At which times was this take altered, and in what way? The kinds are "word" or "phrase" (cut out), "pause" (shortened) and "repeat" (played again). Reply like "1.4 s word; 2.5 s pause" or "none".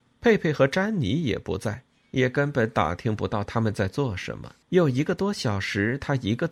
4.6 s pause